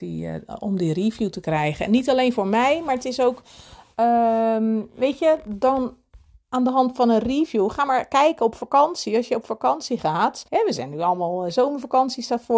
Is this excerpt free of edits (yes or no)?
no